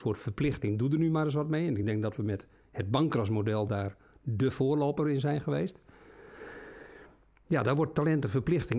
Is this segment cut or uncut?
uncut